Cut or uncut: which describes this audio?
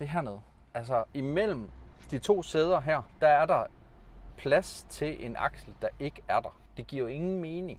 cut